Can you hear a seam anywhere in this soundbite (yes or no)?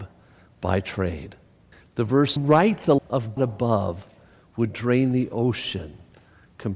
yes